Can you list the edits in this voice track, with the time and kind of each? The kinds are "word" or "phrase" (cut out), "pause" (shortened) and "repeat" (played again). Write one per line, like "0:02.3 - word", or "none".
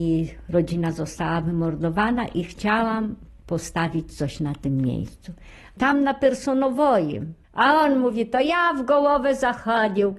0:07.4 - pause